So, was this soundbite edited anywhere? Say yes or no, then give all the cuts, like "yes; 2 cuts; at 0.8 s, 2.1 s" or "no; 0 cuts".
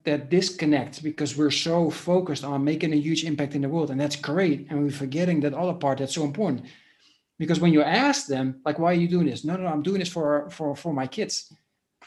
no; 0 cuts